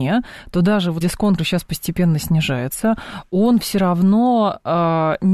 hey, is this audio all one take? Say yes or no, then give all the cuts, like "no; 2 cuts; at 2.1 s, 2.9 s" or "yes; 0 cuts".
no; 2 cuts; at 1.0 s, 1.4 s